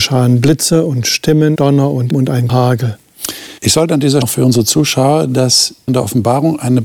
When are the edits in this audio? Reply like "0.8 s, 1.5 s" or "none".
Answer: 1.6 s, 2.1 s, 2.5 s, 3.6 s, 4.2 s, 5.9 s